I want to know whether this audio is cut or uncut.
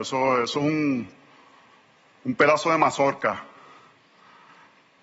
uncut